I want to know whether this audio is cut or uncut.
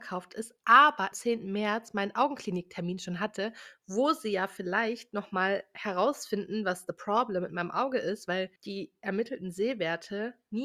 cut